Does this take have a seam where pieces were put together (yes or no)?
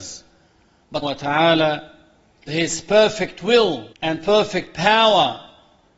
yes